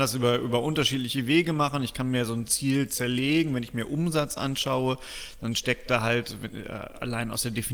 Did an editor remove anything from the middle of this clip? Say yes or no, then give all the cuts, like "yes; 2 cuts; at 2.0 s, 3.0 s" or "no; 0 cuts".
no; 0 cuts